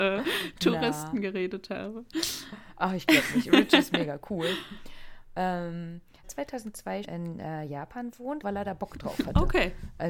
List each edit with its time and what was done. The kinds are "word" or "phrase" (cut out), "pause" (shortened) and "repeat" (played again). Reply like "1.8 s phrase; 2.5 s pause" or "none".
6.2 s phrase; 7.0 s word; 8.4 s word